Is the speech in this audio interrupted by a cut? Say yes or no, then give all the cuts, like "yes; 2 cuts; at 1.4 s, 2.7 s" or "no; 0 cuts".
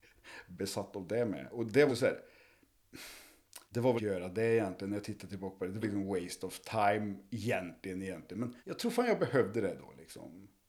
yes; 5 cuts; at 1.9 s, 3.7 s, 4.0 s, 5.8 s, 8.6 s